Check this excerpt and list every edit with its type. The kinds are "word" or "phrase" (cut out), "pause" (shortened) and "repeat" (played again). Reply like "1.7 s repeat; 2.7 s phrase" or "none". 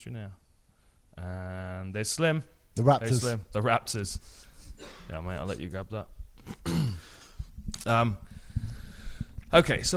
none